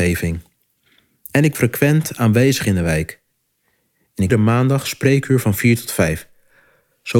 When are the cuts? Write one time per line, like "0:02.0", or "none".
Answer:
0:01.5
0:04.3